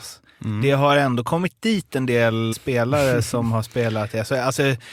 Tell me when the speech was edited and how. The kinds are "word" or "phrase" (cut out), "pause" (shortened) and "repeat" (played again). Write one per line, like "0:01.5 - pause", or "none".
0:02.5 - word